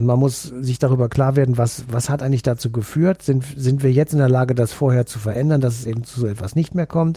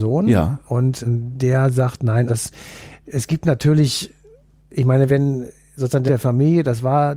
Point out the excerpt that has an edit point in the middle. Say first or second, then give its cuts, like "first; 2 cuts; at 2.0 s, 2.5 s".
second; 4 cuts; at 1.1 s, 2.3 s, 5.1 s, 6.1 s